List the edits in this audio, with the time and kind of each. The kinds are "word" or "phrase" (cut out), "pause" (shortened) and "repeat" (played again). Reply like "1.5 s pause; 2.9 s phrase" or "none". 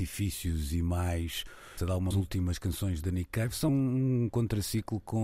1.8 s word; 2.1 s phrase; 3.0 s word; 3.7 s phrase